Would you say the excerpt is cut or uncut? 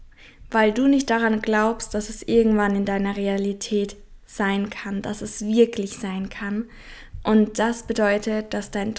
cut